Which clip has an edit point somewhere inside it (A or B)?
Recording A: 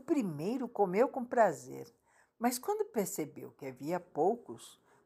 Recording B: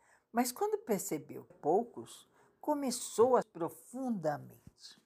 B